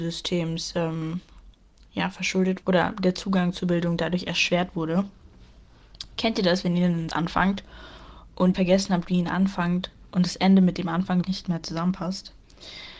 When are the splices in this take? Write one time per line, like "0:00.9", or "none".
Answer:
0:02.6
0:07.1
0:08.5
0:11.2